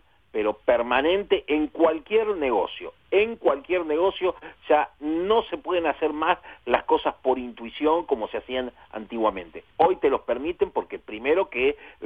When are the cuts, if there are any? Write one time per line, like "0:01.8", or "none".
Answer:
0:09.7